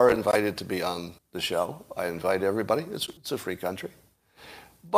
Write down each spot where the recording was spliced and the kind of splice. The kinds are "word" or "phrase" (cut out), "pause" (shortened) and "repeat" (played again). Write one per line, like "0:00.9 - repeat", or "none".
0:01.2 - pause
0:03.2 - pause